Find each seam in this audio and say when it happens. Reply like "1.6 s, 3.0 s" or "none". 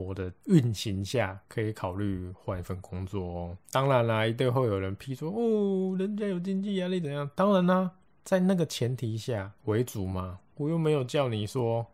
8.1 s, 9.6 s

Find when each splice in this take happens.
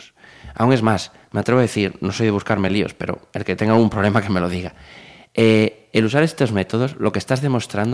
none

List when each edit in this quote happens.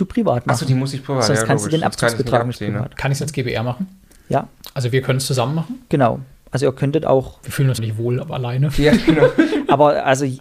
7.8 s

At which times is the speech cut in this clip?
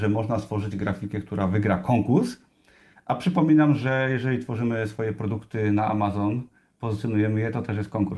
none

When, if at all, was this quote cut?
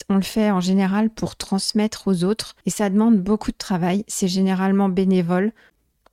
2.6 s

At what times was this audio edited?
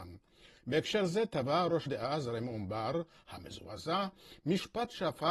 1.9 s

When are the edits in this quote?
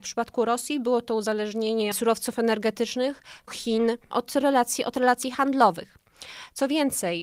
1.9 s, 3.5 s

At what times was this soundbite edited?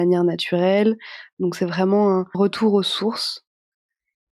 2.3 s

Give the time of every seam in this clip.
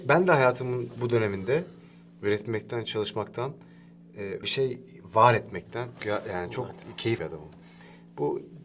4.4 s, 6.0 s, 7.2 s

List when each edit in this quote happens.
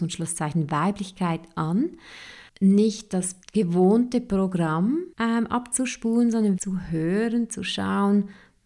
2.5 s, 3.4 s, 5.1 s, 6.6 s

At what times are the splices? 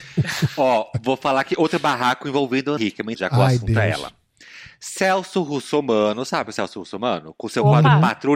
2.8 s, 3.1 s

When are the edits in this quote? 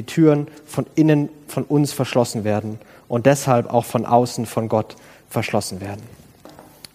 none

